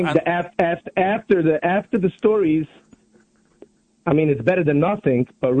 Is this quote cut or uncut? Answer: uncut